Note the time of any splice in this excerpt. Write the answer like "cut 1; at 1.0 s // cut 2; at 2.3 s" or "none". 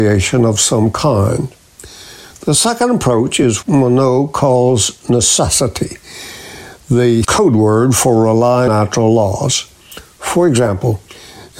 cut 1; at 3.6 s // cut 2; at 7.2 s // cut 3; at 8.7 s